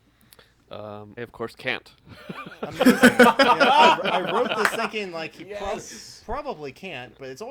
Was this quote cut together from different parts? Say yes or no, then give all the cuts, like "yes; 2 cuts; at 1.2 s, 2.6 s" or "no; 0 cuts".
yes; 1 cut; at 1.2 s